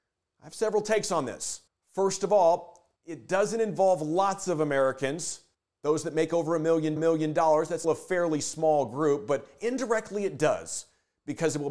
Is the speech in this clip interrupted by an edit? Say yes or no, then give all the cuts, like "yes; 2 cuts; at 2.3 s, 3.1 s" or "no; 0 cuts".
yes; 5 cuts; at 1.7 s, 3.0 s, 5.5 s, 7.0 s, 7.8 s